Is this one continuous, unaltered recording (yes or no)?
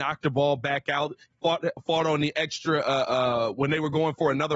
yes